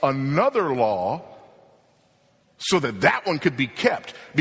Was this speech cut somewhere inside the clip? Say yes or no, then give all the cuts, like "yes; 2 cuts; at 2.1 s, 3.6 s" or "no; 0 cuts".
no; 0 cuts